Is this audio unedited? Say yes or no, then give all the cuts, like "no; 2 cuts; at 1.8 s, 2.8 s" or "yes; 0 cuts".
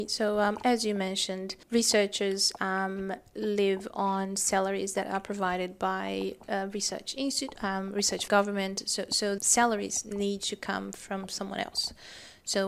no; 3 cuts; at 1.6 s, 8.3 s, 9.4 s